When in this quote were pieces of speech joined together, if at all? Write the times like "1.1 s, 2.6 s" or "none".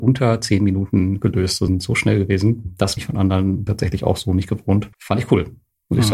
1.7 s, 3.0 s, 3.7 s, 4.9 s